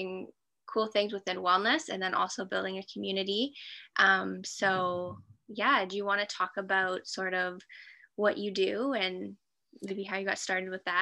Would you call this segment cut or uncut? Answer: uncut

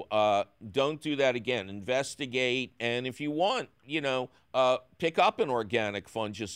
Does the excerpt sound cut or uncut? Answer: uncut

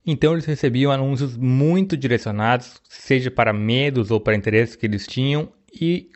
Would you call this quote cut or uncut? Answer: uncut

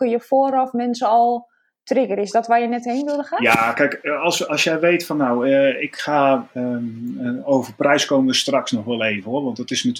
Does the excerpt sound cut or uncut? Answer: uncut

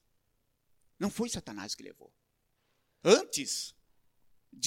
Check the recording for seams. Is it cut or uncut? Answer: uncut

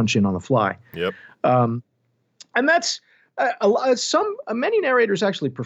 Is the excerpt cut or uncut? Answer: uncut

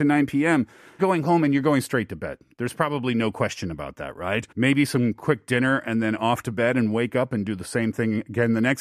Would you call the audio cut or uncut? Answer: cut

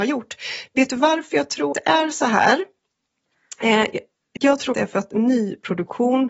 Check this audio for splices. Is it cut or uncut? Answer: cut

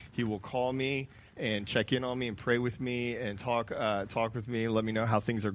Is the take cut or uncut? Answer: uncut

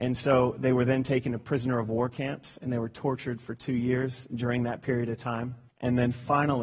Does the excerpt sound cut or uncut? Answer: cut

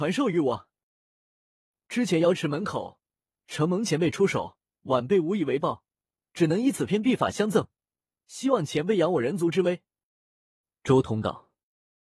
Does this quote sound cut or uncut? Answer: uncut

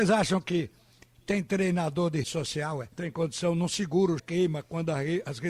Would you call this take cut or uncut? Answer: cut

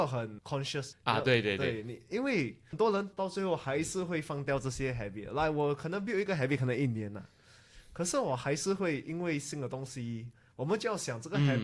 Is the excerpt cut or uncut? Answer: uncut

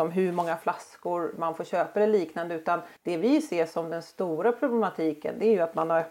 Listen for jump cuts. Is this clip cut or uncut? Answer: cut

